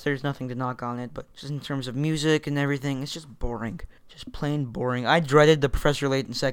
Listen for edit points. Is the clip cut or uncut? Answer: cut